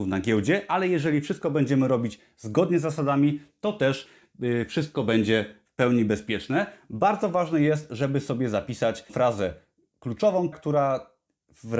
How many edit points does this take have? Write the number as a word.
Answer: two